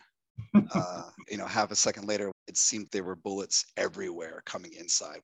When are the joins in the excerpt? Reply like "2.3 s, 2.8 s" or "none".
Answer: 1.2 s, 2.3 s, 2.9 s